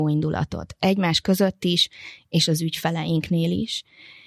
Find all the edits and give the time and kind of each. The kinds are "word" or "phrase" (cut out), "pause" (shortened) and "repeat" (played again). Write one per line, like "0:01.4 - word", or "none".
none